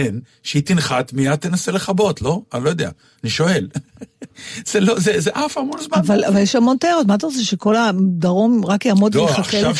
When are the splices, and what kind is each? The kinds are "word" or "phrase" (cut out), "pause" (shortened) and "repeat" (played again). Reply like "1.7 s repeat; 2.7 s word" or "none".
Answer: none